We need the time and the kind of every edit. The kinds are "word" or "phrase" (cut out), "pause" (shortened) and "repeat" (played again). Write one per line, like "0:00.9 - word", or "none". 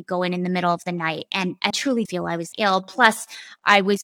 0:01.7 - word
0:02.1 - word
0:02.5 - word

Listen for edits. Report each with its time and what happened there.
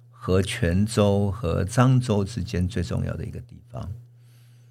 none

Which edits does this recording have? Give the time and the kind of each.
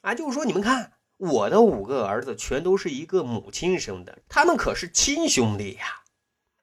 0:01.0 - pause

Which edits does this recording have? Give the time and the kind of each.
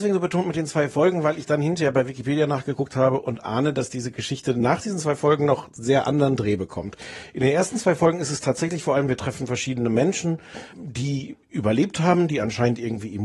0:10.7 - word

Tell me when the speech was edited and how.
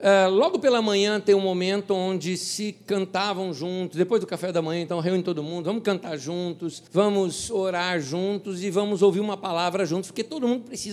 0:06.9 - pause

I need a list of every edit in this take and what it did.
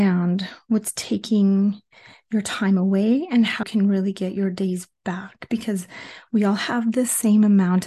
0:03.6 - word

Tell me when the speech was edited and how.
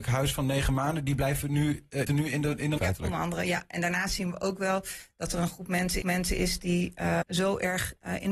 0:02.1 - phrase
0:02.8 - word
0:06.0 - repeat
0:07.2 - word

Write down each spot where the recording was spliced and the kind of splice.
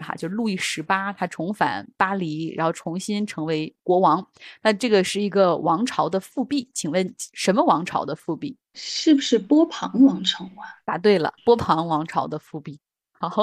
0:03.8 - pause
0:08.6 - pause
0:11.4 - pause

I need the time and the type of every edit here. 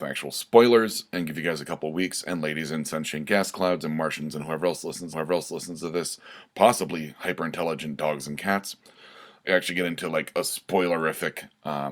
0:05.1 - repeat
0:09.4 - phrase

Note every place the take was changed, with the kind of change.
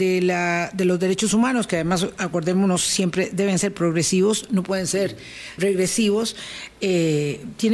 0:05.6 - word

